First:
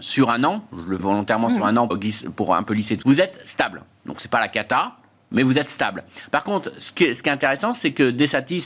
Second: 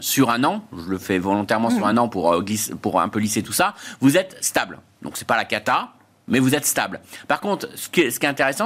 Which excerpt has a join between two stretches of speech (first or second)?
first